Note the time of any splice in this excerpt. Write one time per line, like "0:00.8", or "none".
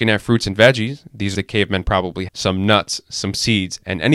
0:01.3
0:02.3